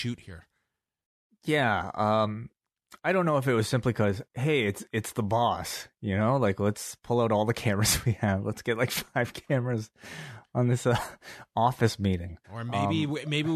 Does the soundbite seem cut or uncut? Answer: cut